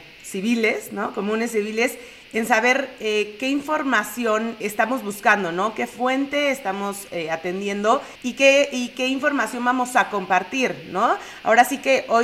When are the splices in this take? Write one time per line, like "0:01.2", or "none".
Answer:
0:04.6
0:08.2